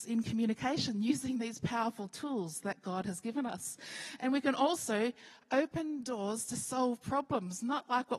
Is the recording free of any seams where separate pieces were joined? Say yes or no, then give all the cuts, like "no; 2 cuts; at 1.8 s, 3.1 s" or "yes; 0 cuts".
yes; 0 cuts